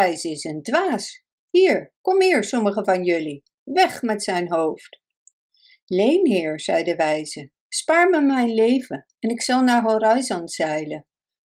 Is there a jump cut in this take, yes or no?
no